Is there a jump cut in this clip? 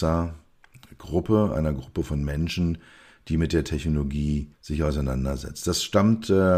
yes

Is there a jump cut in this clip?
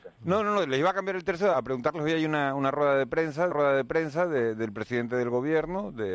yes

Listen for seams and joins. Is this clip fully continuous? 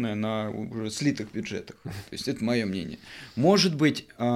yes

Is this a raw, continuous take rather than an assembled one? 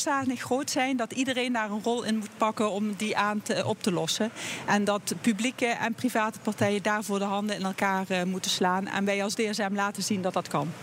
yes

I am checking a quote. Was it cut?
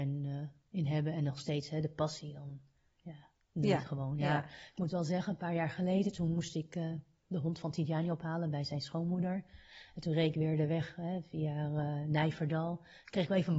no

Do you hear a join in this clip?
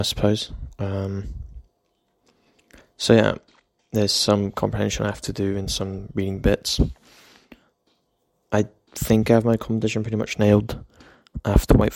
no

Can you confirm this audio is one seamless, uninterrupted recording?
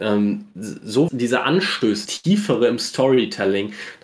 no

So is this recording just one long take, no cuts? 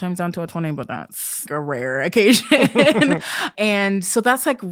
no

